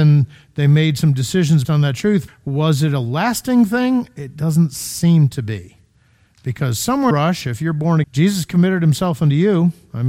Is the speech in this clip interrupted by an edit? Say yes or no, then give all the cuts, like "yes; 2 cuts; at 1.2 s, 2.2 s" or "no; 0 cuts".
yes; 4 cuts; at 1.6 s, 2.3 s, 7.1 s, 8.0 s